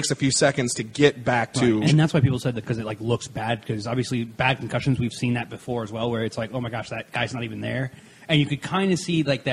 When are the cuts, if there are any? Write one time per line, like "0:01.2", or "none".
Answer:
0:01.9
0:02.6